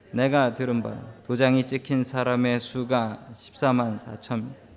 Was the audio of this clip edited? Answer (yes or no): yes